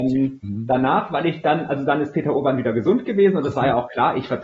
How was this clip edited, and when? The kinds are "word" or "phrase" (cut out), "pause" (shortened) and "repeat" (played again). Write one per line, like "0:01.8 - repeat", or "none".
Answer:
none

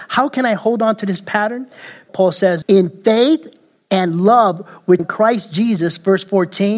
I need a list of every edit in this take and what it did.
0:02.1 - word
0:02.6 - word
0:05.0 - word

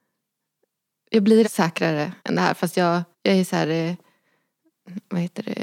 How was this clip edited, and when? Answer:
0:01.4 - word
0:02.2 - pause
0:03.1 - pause

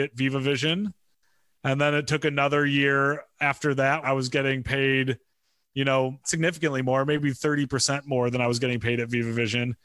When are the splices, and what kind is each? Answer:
0:04.0 - word
0:06.2 - phrase

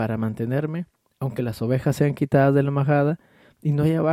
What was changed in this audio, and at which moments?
none

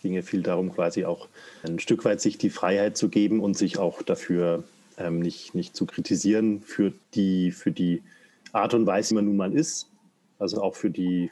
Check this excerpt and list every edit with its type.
0:01.6 - word
0:07.0 - pause
0:09.1 - word

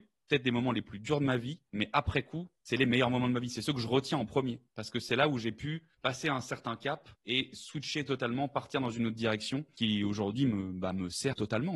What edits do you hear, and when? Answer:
0:04.7 - pause

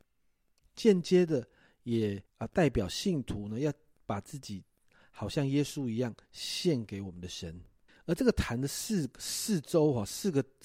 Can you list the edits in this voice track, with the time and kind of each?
0:02.3 - pause
0:07.9 - pause

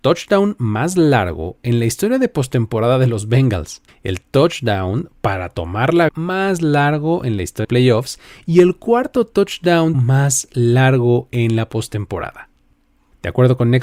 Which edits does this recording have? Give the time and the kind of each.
0:03.9 - pause
0:06.1 - word
0:07.6 - word
0:09.9 - word

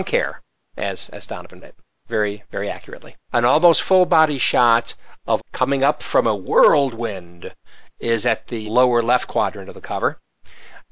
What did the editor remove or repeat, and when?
0:01.6 - word
0:03.2 - pause
0:05.4 - word
0:08.7 - word

